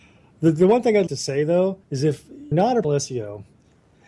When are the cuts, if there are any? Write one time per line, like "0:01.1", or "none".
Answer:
0:01.1
0:01.8
0:02.5
0:02.8

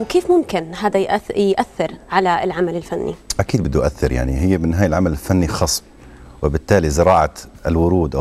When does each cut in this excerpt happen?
none

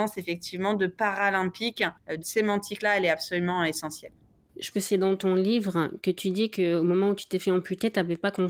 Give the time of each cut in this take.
0:02.2
0:04.7

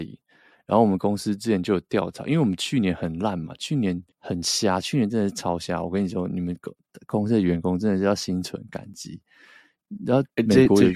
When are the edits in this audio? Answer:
0:04.1

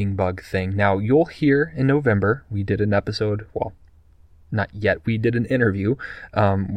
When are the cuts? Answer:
none

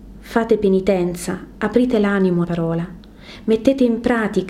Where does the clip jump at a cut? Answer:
0:02.4

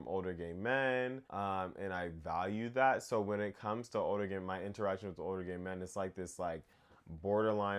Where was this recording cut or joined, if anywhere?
0:01.3

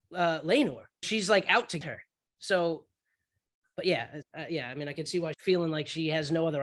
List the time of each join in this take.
0:01.0
0:01.8
0:04.2
0:05.3

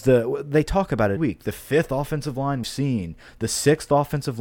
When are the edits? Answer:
0:01.2
0:02.6

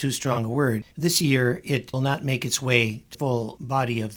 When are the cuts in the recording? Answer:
0:00.9
0:01.9
0:03.1

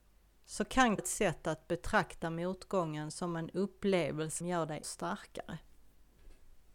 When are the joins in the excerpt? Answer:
0:01.0
0:04.4
0:04.8

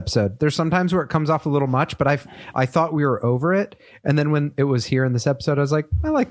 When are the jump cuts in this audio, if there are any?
none

